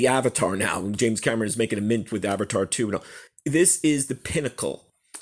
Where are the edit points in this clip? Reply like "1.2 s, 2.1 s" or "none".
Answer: none